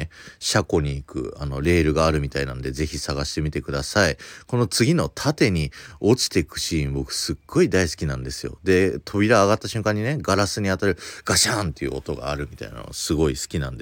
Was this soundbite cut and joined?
no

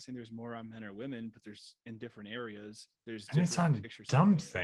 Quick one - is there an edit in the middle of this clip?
yes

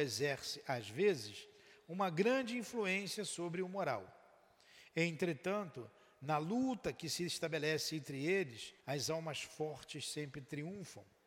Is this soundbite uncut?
no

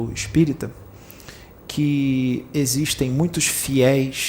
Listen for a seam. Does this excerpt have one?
no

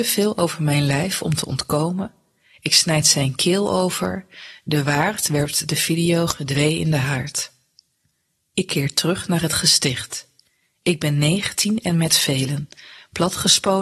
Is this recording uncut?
yes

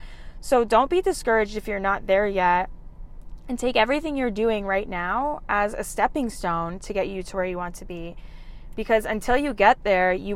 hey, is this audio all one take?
yes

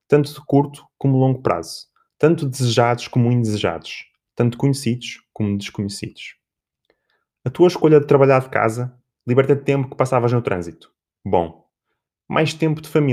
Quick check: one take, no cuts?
yes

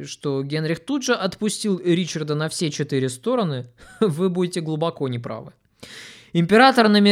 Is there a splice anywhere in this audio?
no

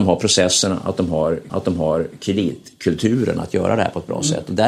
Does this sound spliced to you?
yes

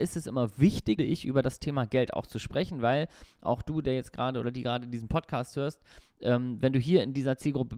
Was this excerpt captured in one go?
no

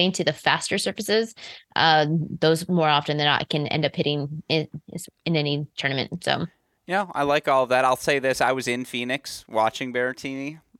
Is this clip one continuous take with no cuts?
yes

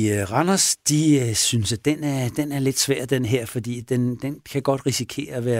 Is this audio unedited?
yes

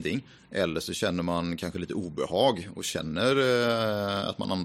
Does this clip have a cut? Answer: no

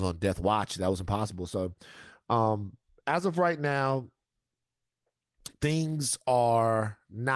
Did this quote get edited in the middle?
no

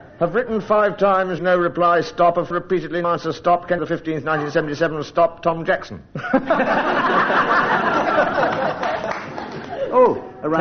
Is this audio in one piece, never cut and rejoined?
no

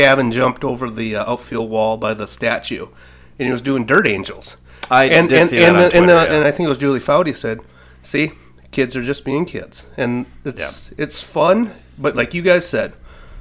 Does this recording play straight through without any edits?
yes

